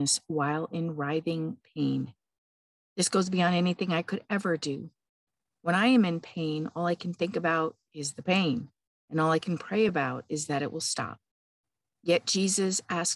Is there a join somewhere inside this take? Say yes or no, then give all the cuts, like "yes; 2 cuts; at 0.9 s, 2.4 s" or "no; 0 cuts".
no; 0 cuts